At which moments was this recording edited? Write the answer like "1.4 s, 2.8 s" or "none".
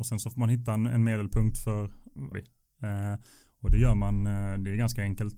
2.3 s